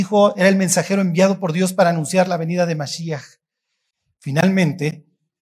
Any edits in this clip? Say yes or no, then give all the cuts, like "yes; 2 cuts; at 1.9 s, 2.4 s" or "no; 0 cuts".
no; 0 cuts